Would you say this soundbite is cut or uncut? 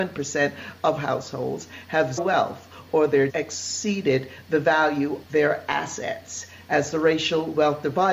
cut